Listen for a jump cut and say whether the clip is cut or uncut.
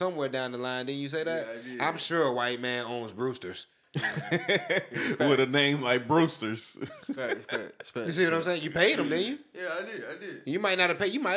uncut